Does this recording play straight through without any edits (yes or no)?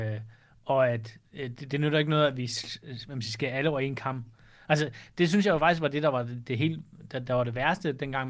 yes